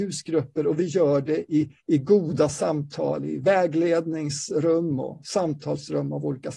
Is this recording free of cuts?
no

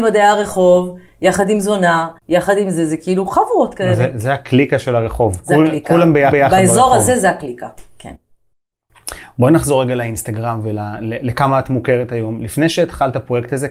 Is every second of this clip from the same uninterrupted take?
no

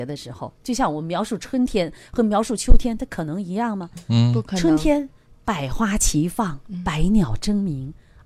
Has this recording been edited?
no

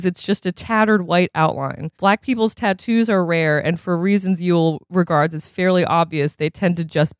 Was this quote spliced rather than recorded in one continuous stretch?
yes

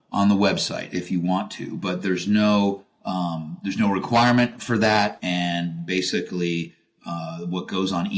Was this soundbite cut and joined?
no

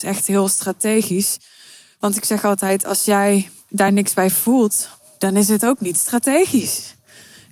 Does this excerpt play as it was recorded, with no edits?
yes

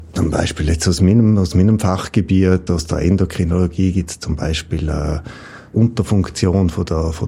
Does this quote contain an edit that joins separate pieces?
yes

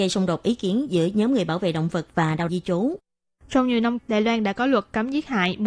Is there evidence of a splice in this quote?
yes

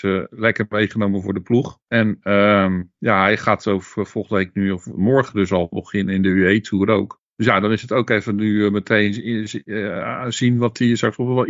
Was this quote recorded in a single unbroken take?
no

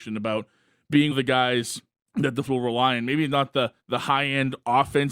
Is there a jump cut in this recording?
yes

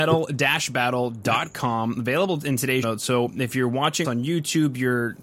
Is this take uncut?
no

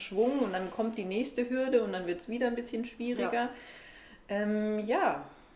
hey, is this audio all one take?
yes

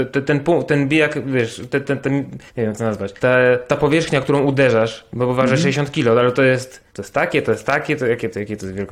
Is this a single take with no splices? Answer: no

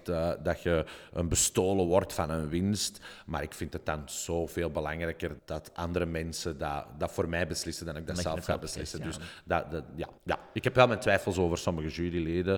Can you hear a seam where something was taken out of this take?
yes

